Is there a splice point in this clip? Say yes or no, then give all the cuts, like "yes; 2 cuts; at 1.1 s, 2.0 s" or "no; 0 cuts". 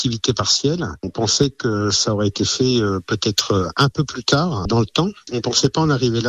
no; 0 cuts